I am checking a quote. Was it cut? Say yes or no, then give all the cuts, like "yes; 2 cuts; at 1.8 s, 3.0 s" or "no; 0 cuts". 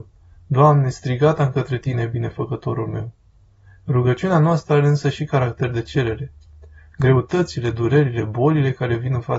no; 0 cuts